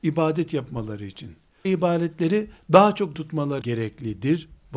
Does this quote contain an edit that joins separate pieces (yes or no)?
yes